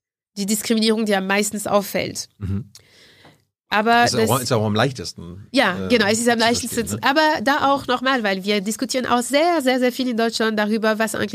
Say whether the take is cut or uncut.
uncut